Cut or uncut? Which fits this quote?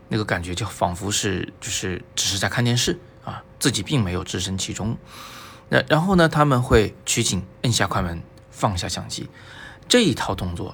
cut